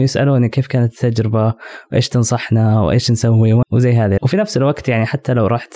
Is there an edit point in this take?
yes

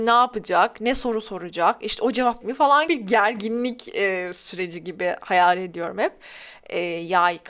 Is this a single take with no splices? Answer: no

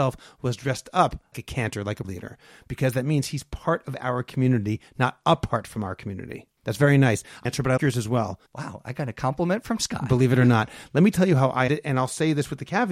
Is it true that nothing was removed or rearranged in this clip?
no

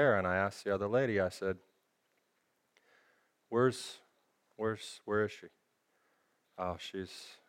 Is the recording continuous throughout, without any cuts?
yes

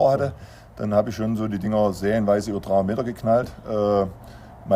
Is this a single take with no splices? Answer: yes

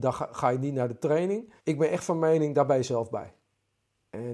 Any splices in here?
yes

